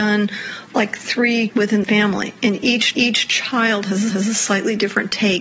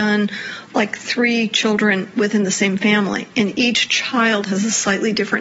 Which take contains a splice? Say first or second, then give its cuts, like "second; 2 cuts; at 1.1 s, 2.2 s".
first; 4 cuts; at 1.5 s, 1.8 s, 2.9 s, 4.1 s